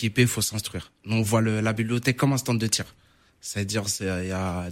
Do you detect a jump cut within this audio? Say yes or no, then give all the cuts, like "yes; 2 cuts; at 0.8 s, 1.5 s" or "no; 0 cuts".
no; 0 cuts